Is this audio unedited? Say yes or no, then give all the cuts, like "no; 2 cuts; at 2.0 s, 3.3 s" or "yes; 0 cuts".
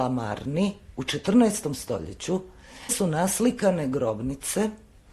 no; 1 cut; at 2.9 s